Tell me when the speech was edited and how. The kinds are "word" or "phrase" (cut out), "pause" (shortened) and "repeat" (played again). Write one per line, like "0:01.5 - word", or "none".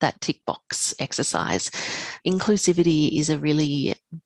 0:02.2 - word